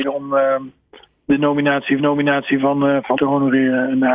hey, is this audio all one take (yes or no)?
no